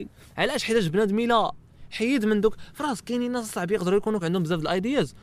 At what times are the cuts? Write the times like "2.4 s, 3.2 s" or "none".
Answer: 4.2 s